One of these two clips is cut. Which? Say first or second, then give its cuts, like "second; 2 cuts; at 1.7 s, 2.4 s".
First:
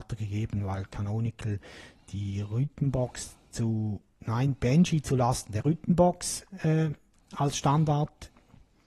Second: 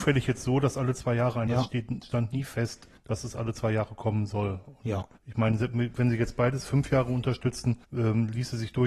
second; 4 cuts; at 1.5 s, 3.0 s, 5.2 s, 7.8 s